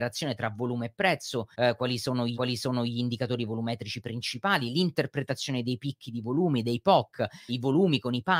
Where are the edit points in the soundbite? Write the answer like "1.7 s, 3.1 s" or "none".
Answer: 1.5 s, 2.3 s, 7.5 s